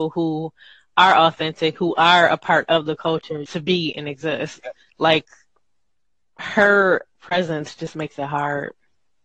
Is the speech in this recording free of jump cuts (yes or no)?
no